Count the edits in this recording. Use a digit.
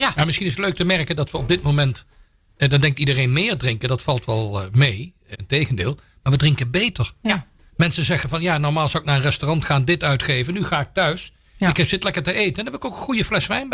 1